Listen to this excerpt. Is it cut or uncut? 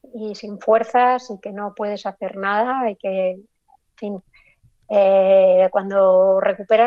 uncut